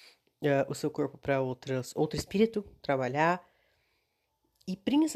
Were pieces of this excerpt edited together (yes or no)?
no